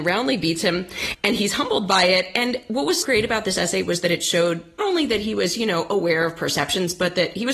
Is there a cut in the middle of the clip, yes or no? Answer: yes